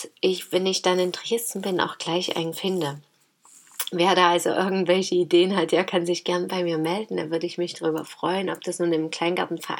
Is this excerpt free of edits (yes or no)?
no